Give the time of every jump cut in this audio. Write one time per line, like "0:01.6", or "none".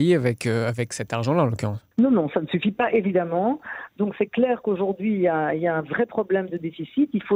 0:01.9